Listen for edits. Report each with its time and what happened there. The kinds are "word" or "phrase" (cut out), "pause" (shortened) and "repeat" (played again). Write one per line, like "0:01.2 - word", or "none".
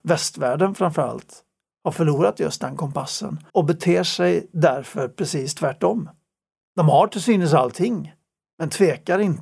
0:03.5 - pause